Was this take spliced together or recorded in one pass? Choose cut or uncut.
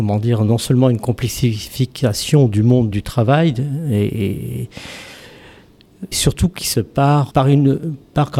cut